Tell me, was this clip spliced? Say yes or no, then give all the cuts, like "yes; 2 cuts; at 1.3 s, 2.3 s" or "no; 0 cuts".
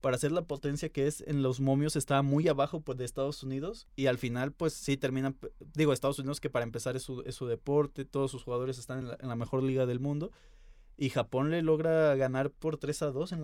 no; 0 cuts